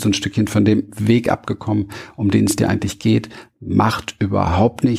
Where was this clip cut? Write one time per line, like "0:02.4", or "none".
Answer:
none